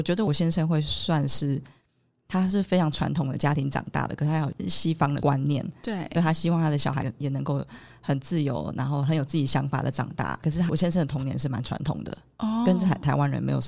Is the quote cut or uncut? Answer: uncut